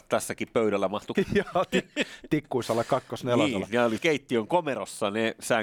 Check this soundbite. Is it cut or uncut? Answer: cut